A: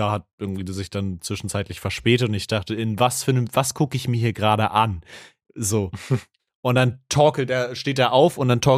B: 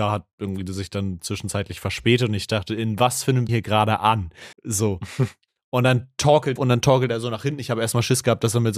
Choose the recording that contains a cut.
B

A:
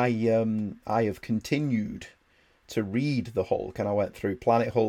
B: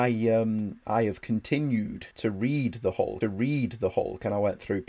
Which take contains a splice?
B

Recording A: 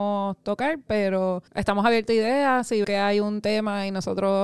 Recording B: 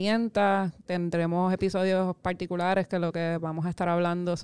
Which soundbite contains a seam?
A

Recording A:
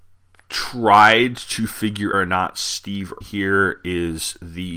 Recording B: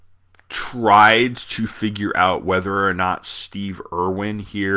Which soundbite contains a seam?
A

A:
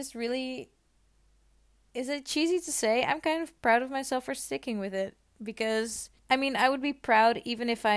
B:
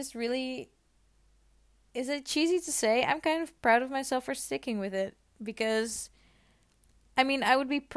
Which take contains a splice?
A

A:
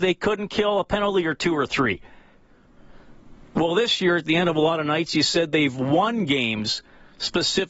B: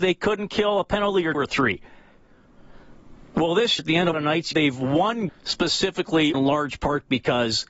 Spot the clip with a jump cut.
B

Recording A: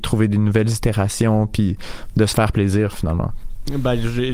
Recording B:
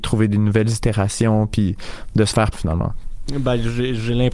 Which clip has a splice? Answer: B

